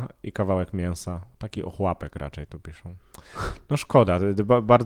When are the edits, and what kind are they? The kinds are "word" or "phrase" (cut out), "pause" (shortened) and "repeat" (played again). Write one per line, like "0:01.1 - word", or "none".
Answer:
none